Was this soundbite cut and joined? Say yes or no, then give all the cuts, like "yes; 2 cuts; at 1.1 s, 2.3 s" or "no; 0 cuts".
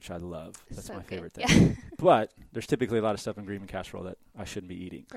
no; 0 cuts